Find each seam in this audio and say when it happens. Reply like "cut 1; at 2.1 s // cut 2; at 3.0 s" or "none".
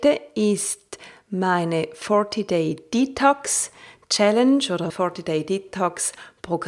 cut 1; at 4.9 s